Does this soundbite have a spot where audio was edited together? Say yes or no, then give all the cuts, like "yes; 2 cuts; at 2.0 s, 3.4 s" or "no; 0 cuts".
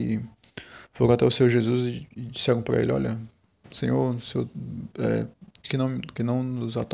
yes; 1 cut; at 5.6 s